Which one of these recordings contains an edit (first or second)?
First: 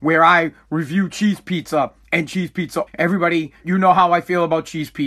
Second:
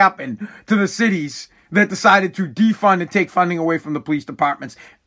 first